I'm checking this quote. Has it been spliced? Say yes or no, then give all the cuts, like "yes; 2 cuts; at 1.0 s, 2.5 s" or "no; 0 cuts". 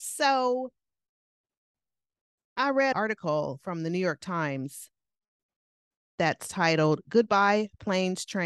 yes; 1 cut; at 2.9 s